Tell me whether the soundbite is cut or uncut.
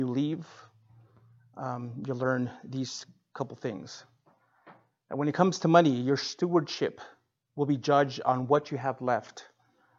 uncut